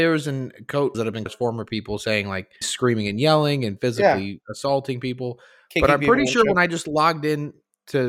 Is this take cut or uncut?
cut